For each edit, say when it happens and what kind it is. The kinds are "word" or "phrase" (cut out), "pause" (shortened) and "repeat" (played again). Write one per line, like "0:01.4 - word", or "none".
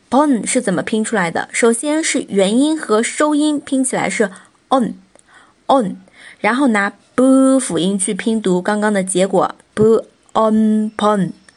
none